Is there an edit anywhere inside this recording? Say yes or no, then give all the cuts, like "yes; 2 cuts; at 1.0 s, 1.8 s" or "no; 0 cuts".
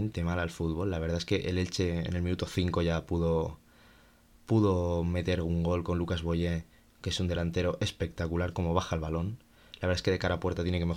no; 0 cuts